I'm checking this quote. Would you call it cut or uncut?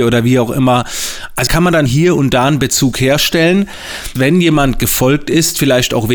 cut